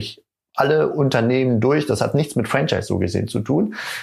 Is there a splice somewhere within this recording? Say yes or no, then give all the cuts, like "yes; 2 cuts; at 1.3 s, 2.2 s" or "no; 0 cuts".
no; 0 cuts